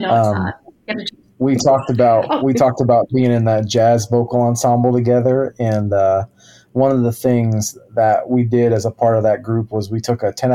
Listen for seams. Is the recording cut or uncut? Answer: uncut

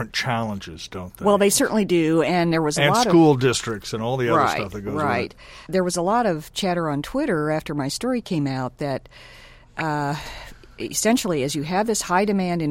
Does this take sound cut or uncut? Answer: cut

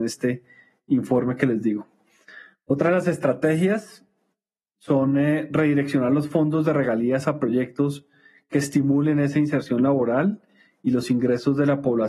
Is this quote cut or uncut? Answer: uncut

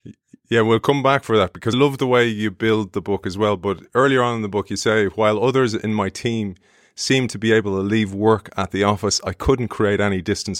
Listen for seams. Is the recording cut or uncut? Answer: cut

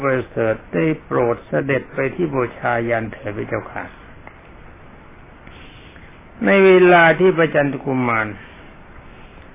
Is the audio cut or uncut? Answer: uncut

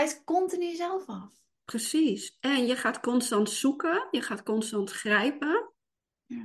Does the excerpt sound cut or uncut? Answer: uncut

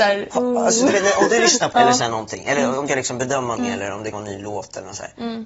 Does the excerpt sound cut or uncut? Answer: cut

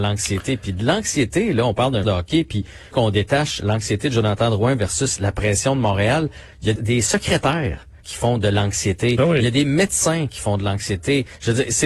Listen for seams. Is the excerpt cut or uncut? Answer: cut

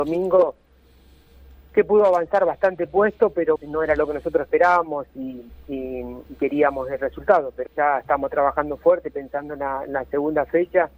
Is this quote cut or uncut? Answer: cut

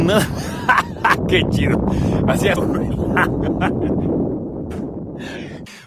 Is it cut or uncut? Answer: cut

